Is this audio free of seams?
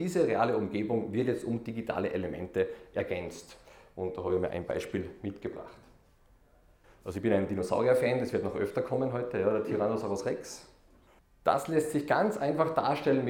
yes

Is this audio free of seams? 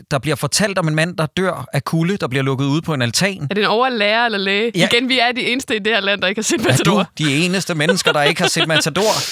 yes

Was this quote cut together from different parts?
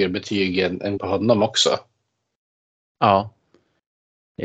yes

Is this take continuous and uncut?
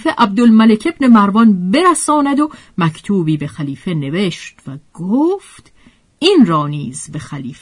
yes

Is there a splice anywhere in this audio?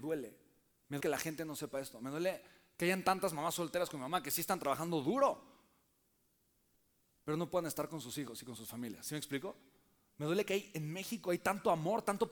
yes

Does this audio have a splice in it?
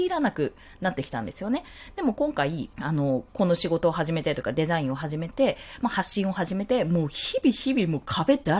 yes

